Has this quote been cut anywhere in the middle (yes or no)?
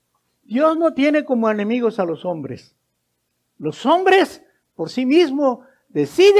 no